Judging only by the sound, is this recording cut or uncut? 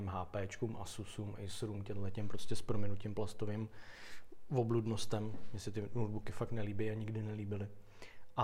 uncut